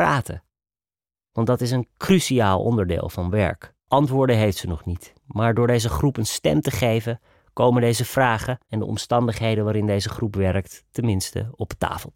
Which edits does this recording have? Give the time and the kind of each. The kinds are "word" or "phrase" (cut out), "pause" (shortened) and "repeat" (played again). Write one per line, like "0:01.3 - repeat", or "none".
0:03.8 - pause
0:05.2 - pause
0:08.6 - pause